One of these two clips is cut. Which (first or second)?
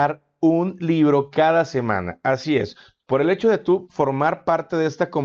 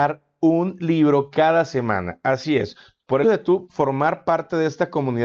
second